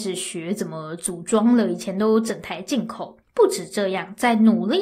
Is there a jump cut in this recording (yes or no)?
yes